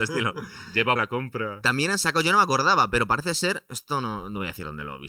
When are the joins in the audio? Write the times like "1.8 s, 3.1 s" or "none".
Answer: 1.0 s